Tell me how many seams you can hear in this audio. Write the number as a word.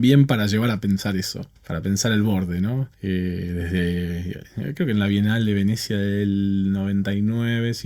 two